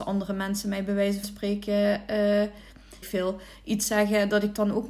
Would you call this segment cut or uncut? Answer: cut